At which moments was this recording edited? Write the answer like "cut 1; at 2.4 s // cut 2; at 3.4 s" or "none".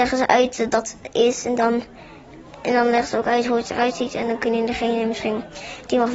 none